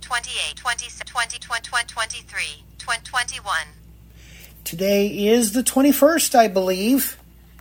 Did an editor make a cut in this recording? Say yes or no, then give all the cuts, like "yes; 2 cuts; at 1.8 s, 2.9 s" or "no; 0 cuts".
no; 0 cuts